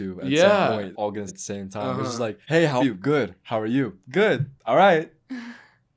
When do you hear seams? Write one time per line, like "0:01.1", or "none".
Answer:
0:00.9
0:01.3
0:02.4
0:02.8
0:04.6